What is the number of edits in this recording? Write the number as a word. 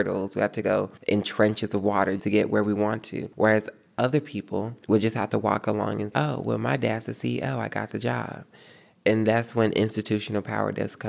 five